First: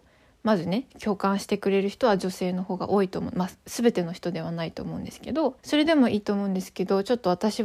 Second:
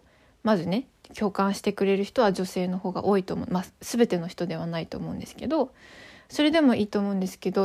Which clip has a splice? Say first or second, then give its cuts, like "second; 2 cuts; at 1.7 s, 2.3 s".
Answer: first; 2 cuts; at 0.9 s, 5.6 s